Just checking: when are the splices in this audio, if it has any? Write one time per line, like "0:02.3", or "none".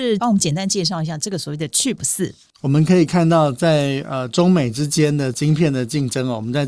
none